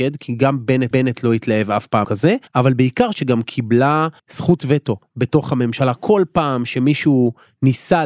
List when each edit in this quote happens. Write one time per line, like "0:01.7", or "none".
0:00.9
0:02.0
0:02.5
0:03.1
0:04.2